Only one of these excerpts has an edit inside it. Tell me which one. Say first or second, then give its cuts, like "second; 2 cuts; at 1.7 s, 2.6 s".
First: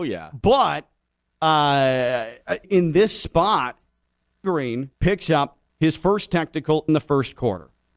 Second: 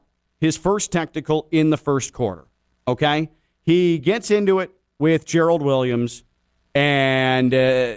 first; 5 cuts; at 2.6 s, 4.4 s, 4.9 s, 5.7 s, 6.9 s